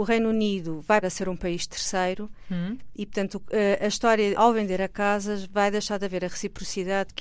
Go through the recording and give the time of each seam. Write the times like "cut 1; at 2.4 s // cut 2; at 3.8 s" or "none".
cut 1; at 1.0 s // cut 2; at 4.3 s